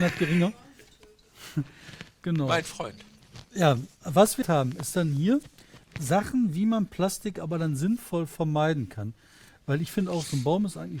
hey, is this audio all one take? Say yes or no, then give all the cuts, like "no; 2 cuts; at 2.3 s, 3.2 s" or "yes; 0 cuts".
no; 2 cuts; at 4.4 s, 5.8 s